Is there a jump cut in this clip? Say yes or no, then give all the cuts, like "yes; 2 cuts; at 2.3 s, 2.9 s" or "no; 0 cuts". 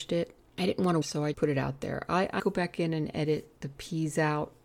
yes; 4 cuts; at 1.0 s, 1.3 s, 2.4 s, 3.6 s